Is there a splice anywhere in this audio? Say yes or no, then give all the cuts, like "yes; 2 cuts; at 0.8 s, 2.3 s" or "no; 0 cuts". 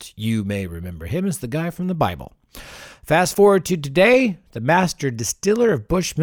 no; 0 cuts